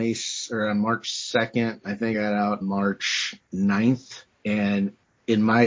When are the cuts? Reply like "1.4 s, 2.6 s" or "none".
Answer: 2.1 s, 2.6 s, 4.3 s